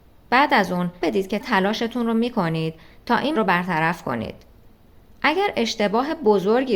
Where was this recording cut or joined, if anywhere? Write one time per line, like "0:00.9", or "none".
0:01.0
0:01.4
0:03.3